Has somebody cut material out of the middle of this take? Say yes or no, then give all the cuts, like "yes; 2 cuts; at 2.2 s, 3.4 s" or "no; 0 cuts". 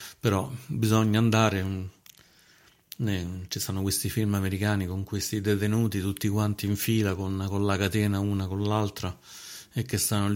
no; 0 cuts